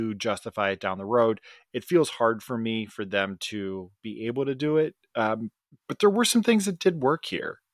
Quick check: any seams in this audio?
yes; 1 cut; at 5.7 s

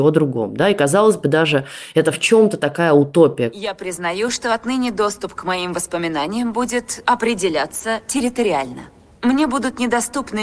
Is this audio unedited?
yes; 0 cuts

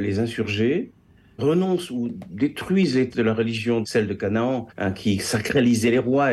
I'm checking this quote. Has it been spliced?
yes; 4 cuts; at 1.4 s, 3.1 s, 3.8 s, 4.7 s

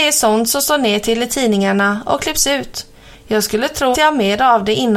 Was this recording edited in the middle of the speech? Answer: yes; 1 cut; at 3.9 s

